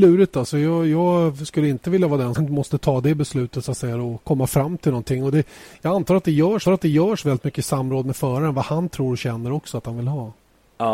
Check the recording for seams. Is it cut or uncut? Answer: cut